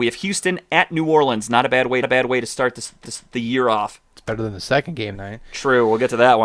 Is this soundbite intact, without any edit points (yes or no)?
no